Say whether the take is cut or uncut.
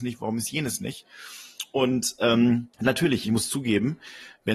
cut